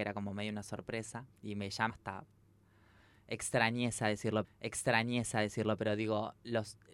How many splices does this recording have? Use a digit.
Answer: 3